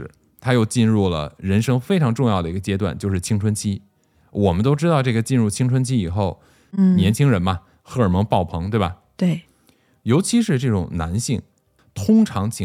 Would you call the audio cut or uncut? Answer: uncut